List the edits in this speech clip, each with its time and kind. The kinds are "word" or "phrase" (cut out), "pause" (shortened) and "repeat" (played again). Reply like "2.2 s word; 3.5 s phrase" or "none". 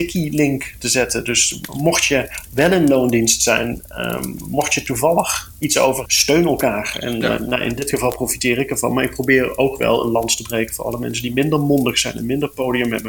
6.1 s word